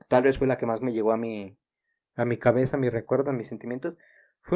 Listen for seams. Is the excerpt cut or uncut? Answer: uncut